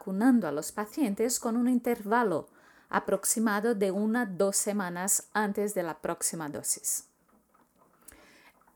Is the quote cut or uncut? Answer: uncut